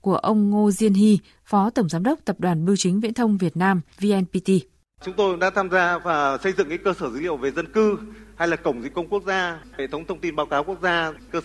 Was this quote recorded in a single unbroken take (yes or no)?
yes